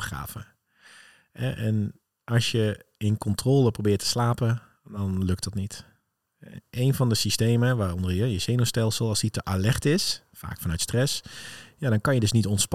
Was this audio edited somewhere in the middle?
no; 0 cuts

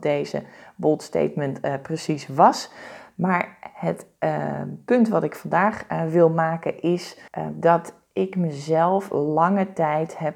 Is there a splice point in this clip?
yes; 1 cut; at 7.3 s

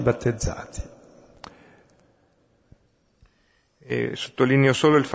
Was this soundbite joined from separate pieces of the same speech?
no; 0 cuts

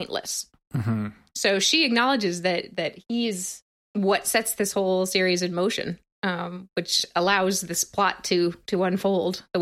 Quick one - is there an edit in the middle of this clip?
no; 0 cuts

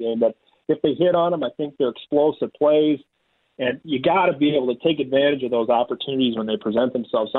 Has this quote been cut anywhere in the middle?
no; 0 cuts

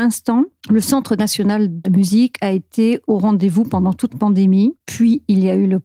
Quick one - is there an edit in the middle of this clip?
yes; 4 cuts; at 1.8 s, 3.0 s, 4.1 s, 4.8 s

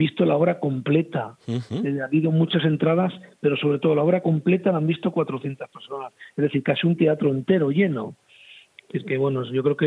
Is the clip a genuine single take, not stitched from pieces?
yes; 0 cuts

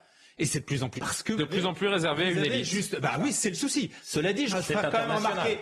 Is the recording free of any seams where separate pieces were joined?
no; 3 cuts; at 1.0 s, 1.4 s, 4.5 s

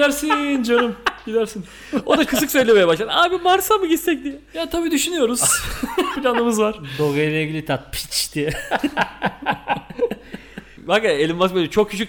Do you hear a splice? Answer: yes; 3 cuts; at 2.3 s, 6.1 s, 7.7 s

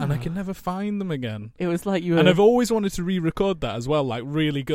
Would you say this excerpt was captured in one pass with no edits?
yes; 0 cuts

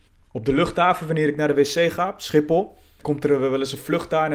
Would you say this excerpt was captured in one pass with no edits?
no; 1 cut; at 3.0 s

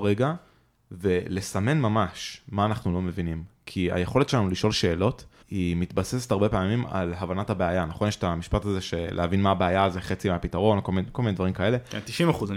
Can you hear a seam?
yes; 1 cut; at 5.4 s

